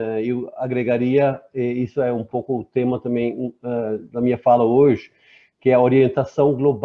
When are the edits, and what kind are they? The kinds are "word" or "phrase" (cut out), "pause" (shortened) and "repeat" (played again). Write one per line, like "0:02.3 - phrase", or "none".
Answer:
none

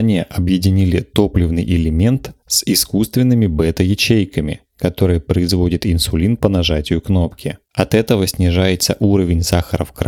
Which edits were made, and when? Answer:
0:07.7 - pause

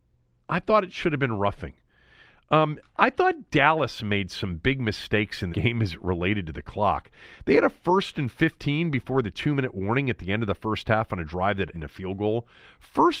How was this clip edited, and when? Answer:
0:05.5 - word
0:11.7 - word

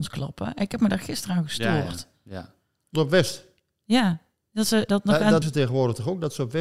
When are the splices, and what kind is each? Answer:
0:02.9 - word
0:04.9 - word
0:05.4 - word

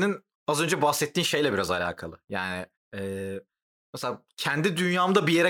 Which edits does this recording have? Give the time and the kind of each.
0:02.7 - pause

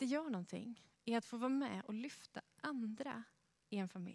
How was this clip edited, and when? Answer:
none

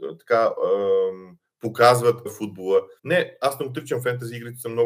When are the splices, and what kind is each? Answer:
0:02.3 - word
0:03.0 - pause

